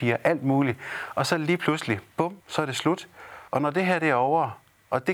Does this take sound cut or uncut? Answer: cut